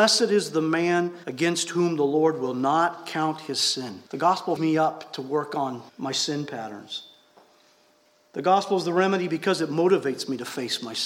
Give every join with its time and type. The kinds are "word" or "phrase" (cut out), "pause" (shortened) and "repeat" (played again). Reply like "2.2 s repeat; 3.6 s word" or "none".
1.2 s pause; 4.1 s pause; 4.6 s word; 5.9 s pause

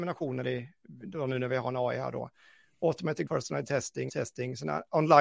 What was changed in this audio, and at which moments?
3.3 s word; 4.1 s word

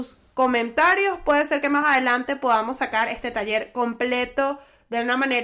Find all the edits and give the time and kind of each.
none

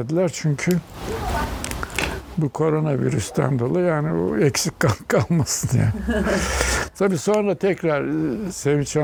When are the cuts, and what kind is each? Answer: none

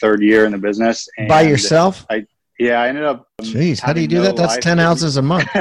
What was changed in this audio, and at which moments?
2.4 s pause

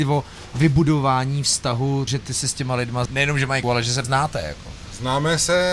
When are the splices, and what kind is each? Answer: 2.1 s word; 3.1 s word; 3.6 s word; 4.0 s word

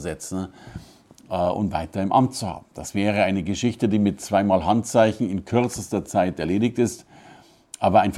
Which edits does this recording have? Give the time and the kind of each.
none

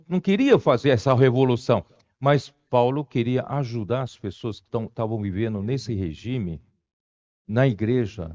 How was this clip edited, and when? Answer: none

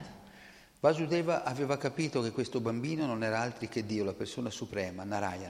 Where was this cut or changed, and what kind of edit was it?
none

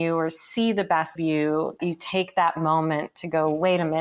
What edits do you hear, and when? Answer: 1.2 s word; 1.8 s word

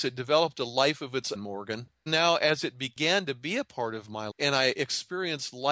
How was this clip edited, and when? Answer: 1.3 s word; 2.1 s word; 4.3 s word

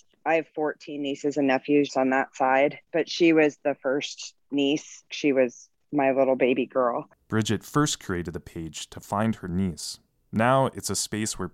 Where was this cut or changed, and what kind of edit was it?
1.9 s word; 2.9 s pause

